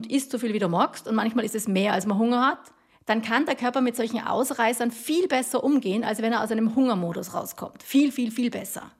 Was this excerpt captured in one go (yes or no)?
no